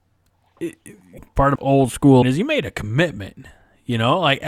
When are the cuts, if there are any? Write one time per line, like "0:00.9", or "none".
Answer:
0:01.2
0:01.6
0:02.2